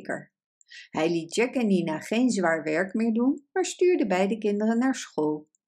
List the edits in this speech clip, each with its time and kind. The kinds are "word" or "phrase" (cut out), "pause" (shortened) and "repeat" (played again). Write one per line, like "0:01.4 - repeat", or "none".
none